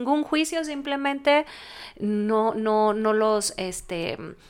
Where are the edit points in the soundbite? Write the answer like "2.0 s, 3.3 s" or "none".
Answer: none

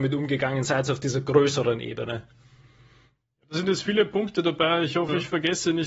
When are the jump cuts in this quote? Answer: none

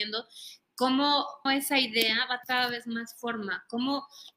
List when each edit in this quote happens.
1.5 s, 2.4 s

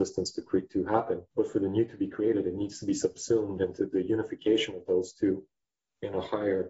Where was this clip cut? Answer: 1.3 s

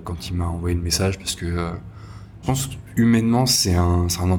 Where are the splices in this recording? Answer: 2.4 s

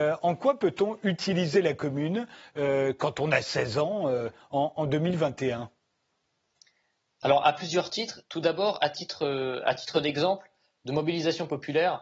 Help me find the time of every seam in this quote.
none

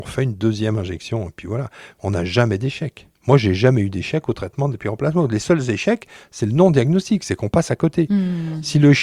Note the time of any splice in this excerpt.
3.2 s

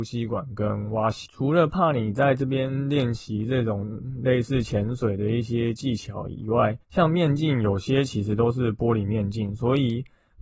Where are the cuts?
6.8 s

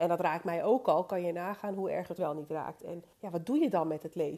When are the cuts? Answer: 2.2 s, 3.1 s

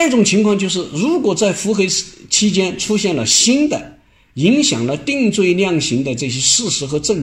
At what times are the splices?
none

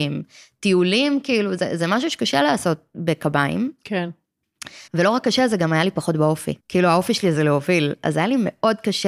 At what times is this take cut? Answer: 4.9 s, 6.6 s

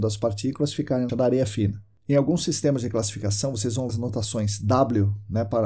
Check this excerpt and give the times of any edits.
1.1 s, 3.9 s

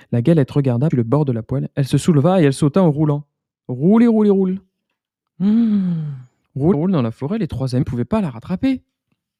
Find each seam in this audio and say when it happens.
0.9 s, 6.7 s, 7.8 s

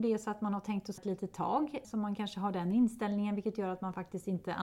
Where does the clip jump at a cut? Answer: 1.0 s, 1.8 s

